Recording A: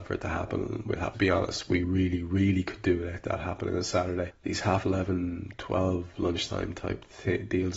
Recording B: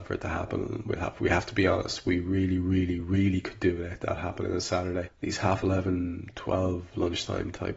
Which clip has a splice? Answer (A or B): A